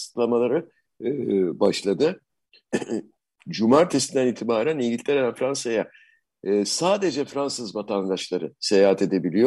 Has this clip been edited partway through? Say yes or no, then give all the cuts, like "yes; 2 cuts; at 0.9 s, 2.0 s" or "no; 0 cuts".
no; 0 cuts